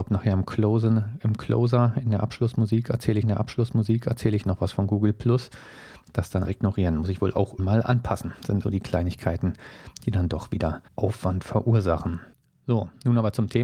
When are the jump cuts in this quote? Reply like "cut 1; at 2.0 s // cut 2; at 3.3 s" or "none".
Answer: cut 1; at 3.2 s // cut 2; at 6.4 s // cut 3; at 7.6 s // cut 4; at 8.6 s // cut 5; at 10.9 s // cut 6; at 12.3 s